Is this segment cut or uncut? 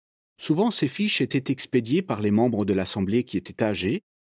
uncut